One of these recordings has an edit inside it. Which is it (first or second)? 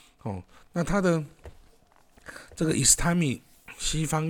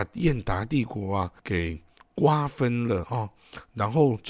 second